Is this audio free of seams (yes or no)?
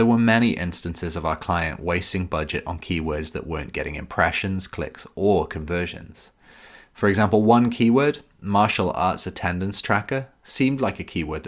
yes